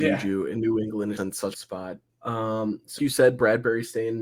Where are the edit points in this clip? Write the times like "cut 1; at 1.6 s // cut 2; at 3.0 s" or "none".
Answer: cut 1; at 1.2 s // cut 2; at 1.5 s // cut 3; at 2.1 s // cut 4; at 3.0 s